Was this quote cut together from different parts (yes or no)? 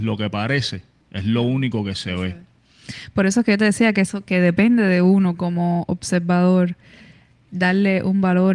no